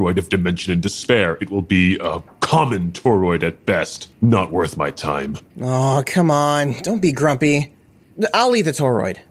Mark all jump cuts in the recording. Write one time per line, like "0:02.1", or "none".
0:04.1
0:05.5